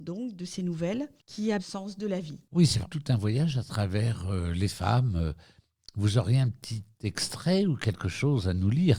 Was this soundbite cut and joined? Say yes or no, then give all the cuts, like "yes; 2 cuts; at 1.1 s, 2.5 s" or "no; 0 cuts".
yes; 3 cuts; at 1.6 s, 2.8 s, 4.7 s